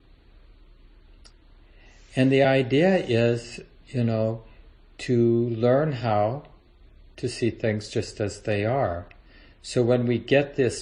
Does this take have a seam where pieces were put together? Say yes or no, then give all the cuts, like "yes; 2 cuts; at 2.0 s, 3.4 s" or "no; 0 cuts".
no; 0 cuts